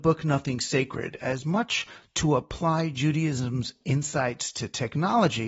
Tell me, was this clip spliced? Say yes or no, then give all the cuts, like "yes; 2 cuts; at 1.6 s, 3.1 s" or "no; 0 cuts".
no; 0 cuts